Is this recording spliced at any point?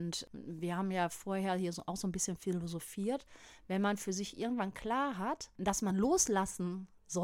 no; 0 cuts

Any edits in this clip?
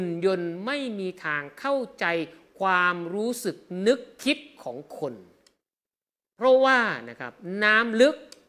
no; 0 cuts

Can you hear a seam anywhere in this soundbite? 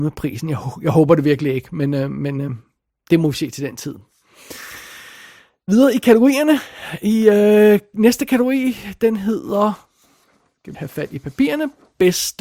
yes; 1 cut; at 10.7 s

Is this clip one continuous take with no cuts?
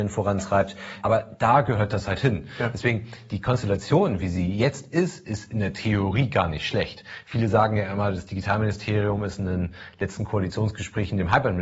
yes; 0 cuts

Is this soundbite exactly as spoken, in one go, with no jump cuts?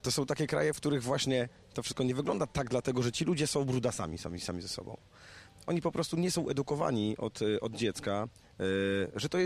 yes; 0 cuts

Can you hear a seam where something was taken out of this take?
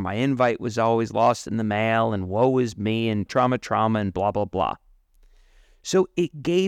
yes; 1 cut; at 3.3 s

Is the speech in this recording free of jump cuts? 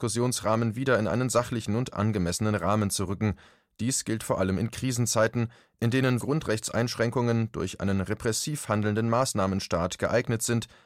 no; 1 cut; at 6.2 s

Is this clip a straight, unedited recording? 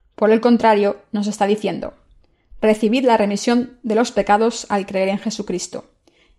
yes; 0 cuts

